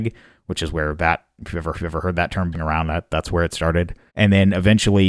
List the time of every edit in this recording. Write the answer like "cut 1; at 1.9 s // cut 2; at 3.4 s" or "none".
cut 1; at 1.7 s // cut 2; at 2.5 s // cut 3; at 4.1 s